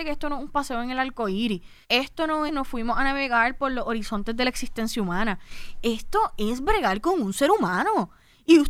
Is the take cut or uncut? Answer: cut